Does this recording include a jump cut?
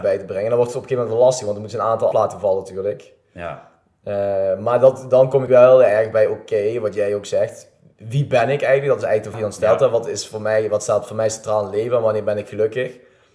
yes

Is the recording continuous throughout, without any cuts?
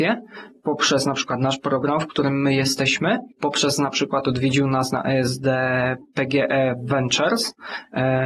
no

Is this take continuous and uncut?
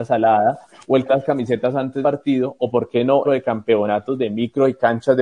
no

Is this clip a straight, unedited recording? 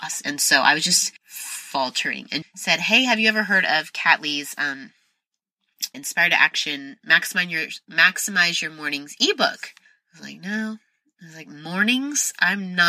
no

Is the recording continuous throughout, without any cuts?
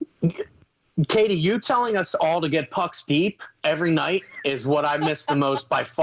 yes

